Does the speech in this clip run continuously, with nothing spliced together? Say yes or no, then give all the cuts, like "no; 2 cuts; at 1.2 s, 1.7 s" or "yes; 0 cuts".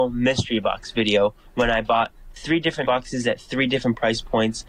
no; 1 cut; at 2.8 s